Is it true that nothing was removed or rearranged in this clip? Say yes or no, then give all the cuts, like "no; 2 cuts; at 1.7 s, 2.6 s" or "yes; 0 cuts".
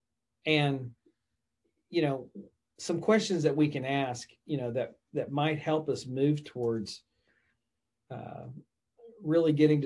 yes; 0 cuts